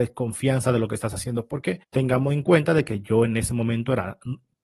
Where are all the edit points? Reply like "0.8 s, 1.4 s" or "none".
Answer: 1.8 s

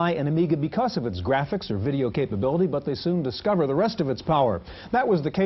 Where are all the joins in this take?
none

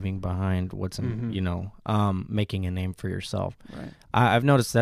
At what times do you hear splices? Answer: none

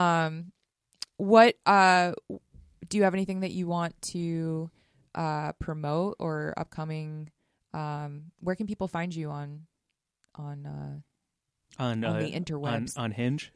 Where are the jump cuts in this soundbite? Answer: none

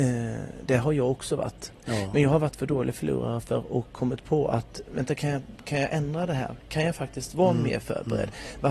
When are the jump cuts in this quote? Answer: 4.9 s

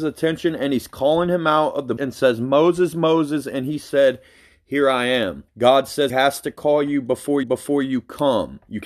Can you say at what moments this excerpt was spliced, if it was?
2.0 s, 5.5 s, 6.1 s, 7.4 s

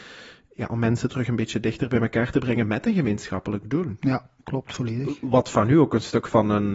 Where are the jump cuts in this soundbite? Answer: 4.4 s

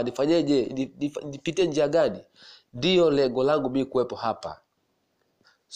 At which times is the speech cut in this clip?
none

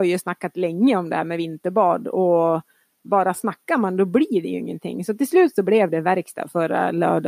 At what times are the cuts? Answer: none

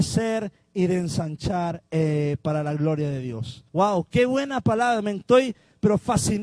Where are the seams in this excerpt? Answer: 1.9 s, 3.7 s

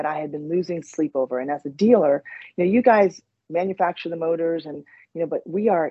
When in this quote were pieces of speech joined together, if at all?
none

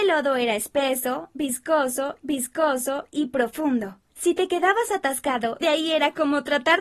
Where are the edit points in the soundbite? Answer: 2.2 s, 4.1 s, 5.6 s

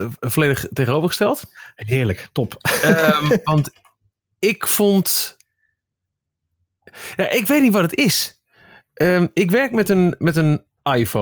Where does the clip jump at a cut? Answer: none

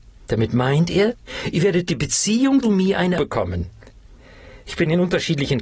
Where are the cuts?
1.9 s, 2.6 s, 3.2 s

